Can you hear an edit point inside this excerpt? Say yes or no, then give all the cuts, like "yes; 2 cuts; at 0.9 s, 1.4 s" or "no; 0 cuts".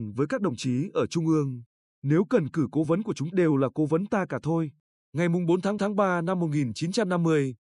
yes; 3 cuts; at 2.8 s, 3.3 s, 5.8 s